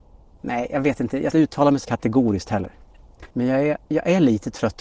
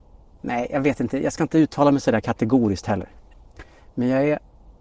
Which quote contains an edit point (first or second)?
first